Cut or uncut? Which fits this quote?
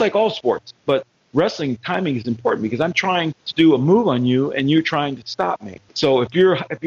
cut